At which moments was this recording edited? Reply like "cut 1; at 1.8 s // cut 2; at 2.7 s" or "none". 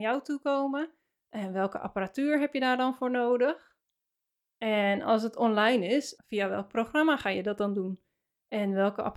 none